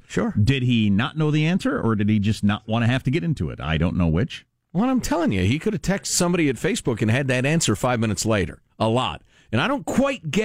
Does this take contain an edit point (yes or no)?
yes